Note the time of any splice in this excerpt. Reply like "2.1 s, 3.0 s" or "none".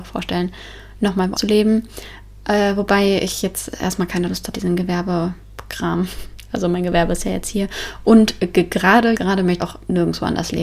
1.3 s, 4.5 s, 9.1 s, 9.6 s